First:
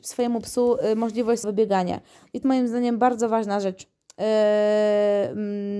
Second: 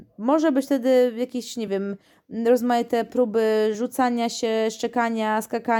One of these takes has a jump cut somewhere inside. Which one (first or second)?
first